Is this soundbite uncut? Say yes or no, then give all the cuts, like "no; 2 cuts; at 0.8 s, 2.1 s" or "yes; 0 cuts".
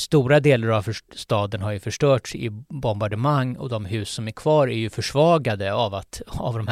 yes; 0 cuts